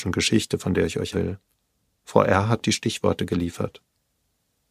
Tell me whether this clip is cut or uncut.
cut